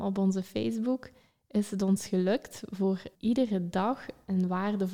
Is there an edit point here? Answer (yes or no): yes